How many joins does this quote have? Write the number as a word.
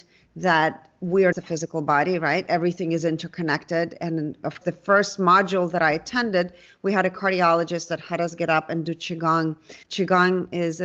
three